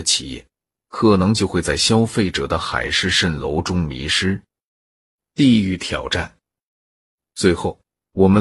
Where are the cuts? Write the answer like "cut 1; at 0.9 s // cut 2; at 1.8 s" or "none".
none